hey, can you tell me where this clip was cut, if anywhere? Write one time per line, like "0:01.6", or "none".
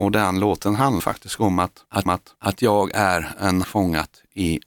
0:01.0
0:02.1
0:03.6

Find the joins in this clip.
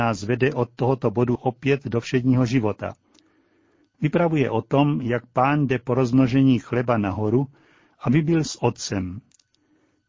0:01.4
0:08.5

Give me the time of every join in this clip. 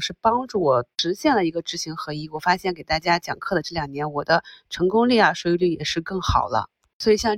0:00.9

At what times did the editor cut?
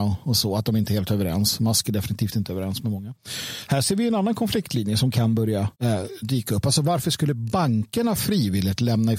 0:05.7

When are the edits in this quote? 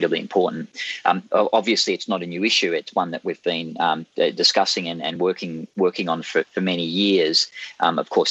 none

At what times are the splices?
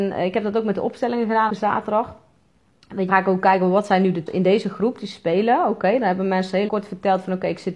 0:01.5
0:03.1
0:04.3
0:06.7

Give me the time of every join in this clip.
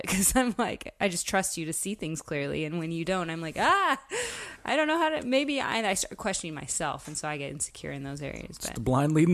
none

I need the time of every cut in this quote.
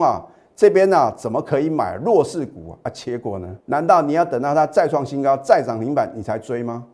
0:03.6

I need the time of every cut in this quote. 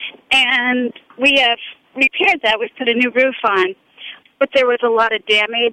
0:04.2

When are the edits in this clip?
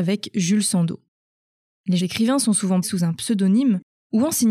0:02.0
0:02.8

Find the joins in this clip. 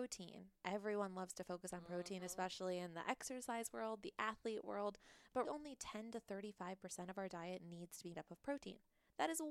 0:05.5
0:08.1

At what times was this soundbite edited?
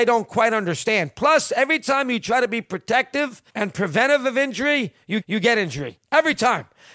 0:03.5
0:05.2

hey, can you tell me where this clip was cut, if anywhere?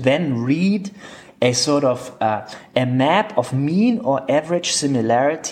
none

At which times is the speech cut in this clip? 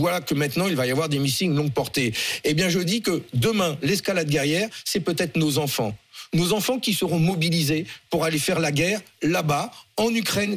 none

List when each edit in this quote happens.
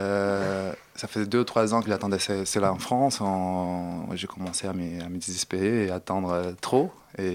none

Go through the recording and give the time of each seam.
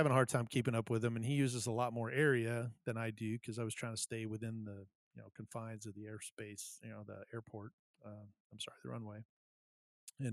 none

